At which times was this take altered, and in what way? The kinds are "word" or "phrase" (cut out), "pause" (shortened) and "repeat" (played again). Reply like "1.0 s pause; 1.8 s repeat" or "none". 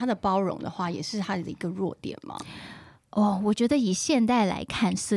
none